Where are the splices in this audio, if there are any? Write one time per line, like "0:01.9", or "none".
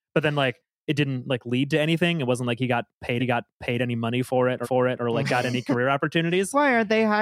0:03.2
0:04.6